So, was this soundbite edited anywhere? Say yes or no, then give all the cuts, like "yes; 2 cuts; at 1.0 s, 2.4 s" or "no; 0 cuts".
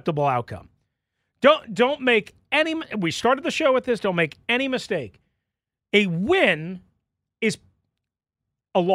no; 0 cuts